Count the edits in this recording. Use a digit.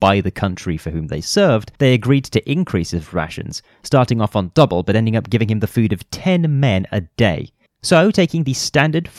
2